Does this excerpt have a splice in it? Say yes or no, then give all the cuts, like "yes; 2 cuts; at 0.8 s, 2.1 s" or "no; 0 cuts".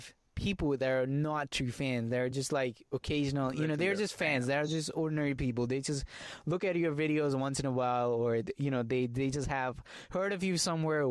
no; 0 cuts